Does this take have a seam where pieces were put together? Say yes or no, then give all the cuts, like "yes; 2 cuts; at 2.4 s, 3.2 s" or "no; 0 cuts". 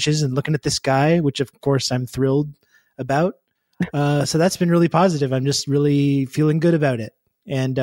no; 0 cuts